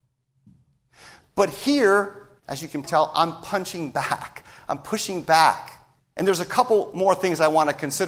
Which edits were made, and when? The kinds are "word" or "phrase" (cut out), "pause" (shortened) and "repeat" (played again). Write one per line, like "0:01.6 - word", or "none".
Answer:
0:02.4 - pause
0:02.8 - word
0:06.0 - pause